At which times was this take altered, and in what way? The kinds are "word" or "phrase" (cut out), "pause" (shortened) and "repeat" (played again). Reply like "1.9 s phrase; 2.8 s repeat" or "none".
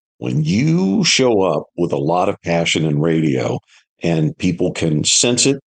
none